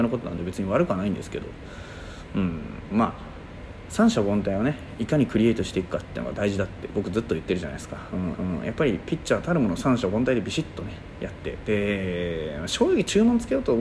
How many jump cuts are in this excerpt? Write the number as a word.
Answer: one